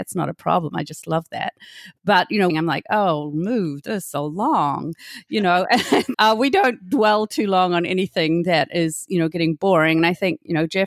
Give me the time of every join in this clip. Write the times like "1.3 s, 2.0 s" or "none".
2.5 s, 6.1 s